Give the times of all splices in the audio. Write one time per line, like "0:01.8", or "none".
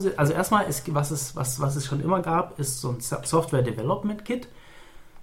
none